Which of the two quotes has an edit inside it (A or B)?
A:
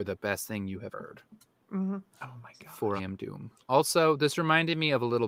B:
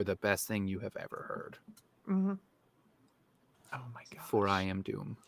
A